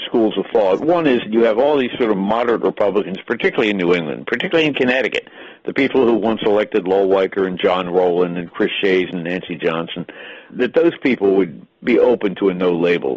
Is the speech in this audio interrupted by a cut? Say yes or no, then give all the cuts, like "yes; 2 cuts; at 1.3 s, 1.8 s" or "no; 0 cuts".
yes; 1 cut; at 10.5 s